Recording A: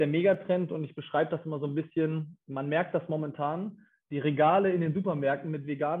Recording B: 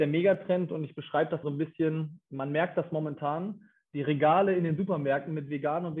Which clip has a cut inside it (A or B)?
B